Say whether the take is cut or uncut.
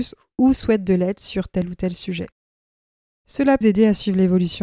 cut